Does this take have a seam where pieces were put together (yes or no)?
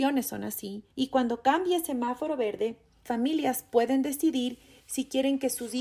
yes